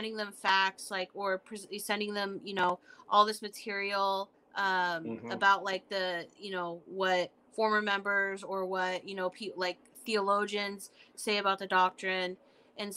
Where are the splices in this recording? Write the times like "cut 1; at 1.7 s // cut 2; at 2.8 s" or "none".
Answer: none